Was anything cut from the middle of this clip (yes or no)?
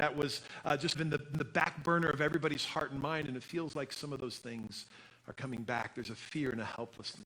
yes